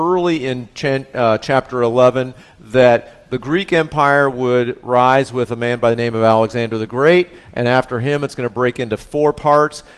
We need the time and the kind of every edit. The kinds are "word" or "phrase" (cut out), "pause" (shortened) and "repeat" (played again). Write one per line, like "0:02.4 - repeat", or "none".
none